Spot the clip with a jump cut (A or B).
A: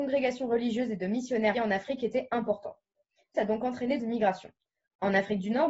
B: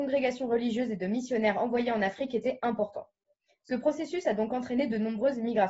A